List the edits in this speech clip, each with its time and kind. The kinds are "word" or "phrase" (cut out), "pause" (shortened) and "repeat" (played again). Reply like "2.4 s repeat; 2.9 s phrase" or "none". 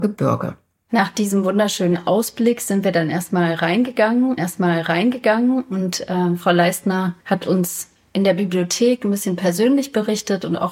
4.4 s repeat; 7.2 s pause